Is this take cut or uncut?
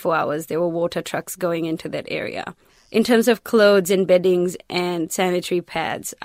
uncut